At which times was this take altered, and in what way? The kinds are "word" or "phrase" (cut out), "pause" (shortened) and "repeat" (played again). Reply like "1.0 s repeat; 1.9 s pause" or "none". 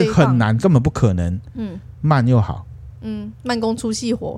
none